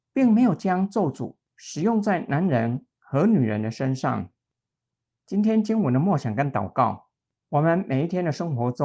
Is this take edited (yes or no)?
no